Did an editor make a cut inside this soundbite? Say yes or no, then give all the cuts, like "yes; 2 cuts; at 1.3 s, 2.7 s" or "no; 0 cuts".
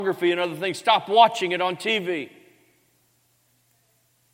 no; 0 cuts